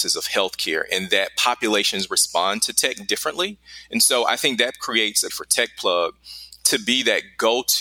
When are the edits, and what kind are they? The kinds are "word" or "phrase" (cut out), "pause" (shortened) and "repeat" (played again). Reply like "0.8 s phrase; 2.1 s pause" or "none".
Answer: 5.3 s phrase

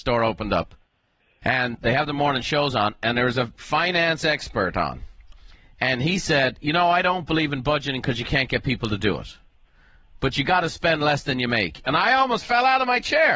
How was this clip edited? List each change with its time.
none

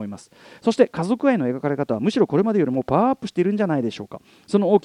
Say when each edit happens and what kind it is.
none

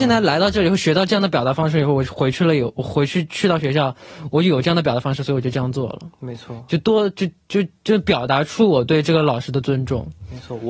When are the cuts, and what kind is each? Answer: none

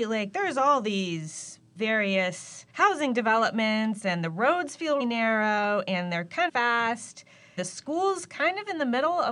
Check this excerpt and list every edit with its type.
1.8 s word; 2.7 s pause; 5.0 s word; 6.5 s word; 7.6 s word

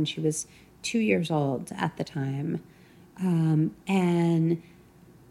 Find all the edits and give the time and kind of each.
none

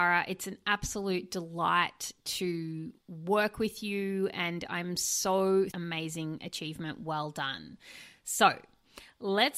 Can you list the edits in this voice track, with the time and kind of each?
3.0 s pause; 5.7 s phrase

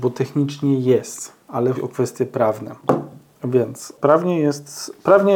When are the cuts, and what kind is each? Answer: 1.7 s word

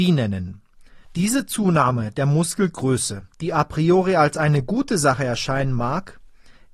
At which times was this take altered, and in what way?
1.0 s pause; 3.3 s pause

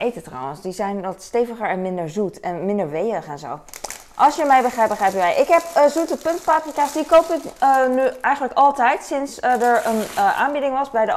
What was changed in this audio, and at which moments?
none

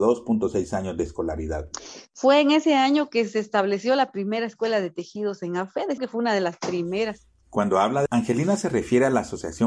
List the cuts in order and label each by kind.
6.0 s phrase; 8.1 s word

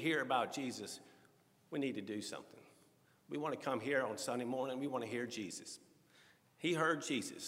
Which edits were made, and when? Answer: none

